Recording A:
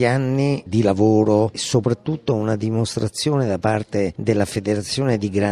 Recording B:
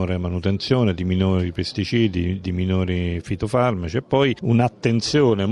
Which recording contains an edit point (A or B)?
A